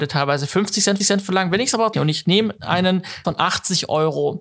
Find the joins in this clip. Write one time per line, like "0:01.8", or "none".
0:01.0
0:01.9
0:03.2